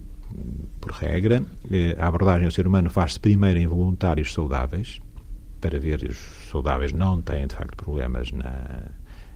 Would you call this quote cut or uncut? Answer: cut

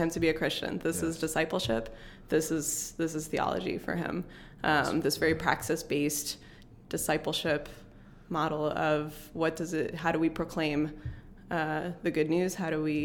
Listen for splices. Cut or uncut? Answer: uncut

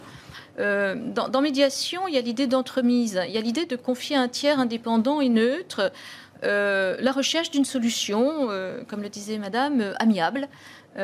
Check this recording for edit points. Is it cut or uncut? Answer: uncut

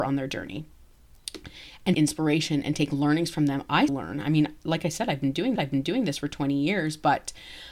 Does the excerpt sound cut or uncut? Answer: cut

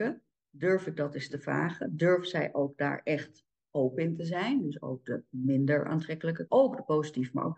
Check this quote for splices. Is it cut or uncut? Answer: cut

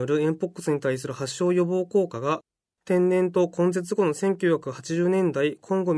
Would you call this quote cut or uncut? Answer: uncut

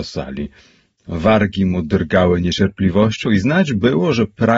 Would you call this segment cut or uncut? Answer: uncut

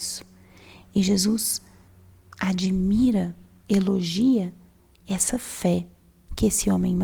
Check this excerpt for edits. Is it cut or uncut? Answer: uncut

